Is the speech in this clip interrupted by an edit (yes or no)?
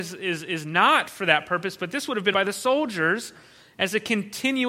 yes